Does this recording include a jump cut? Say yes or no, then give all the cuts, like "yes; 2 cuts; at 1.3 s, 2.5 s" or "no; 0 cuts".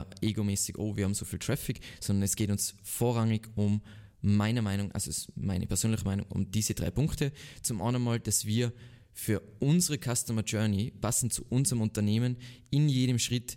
no; 0 cuts